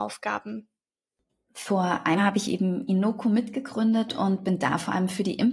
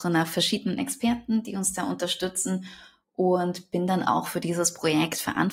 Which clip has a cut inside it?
first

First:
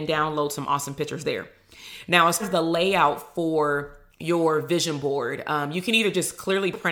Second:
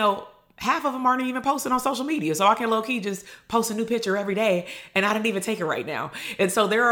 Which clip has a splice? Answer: first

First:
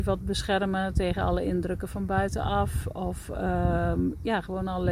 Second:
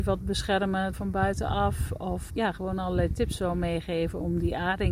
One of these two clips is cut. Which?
second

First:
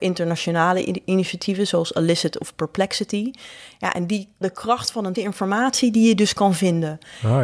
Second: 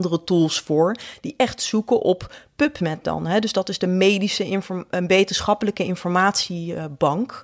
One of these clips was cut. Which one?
first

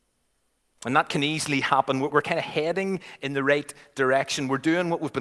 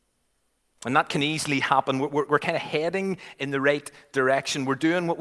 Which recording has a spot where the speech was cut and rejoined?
first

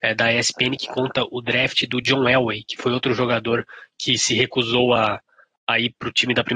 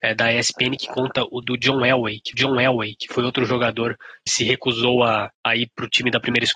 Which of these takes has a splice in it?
second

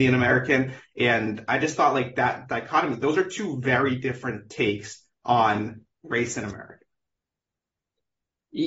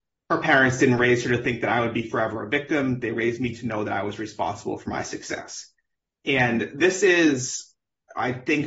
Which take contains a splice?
first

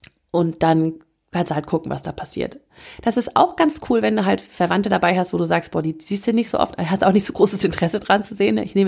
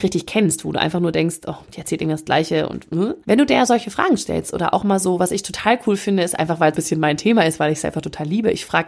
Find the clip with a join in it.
second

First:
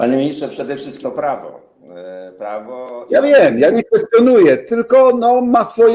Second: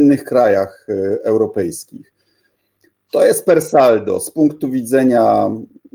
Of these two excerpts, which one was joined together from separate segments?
first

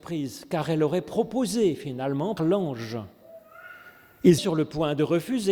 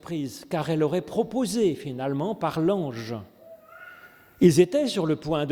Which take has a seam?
first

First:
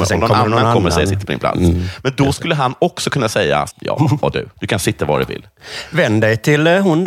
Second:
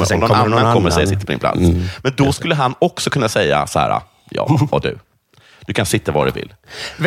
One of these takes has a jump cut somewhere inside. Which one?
first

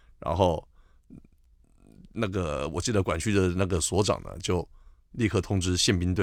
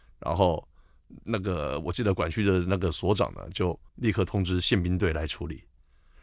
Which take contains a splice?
second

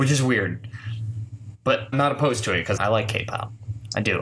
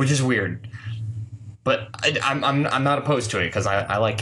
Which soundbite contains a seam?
first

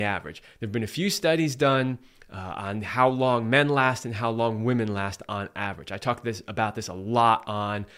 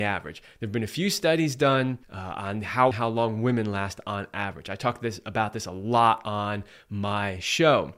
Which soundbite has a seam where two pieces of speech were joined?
second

